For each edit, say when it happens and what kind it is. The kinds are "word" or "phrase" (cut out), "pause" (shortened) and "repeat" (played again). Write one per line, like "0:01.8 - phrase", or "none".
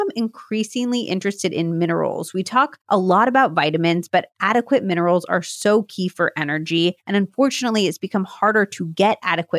0:02.8 - pause
0:07.0 - pause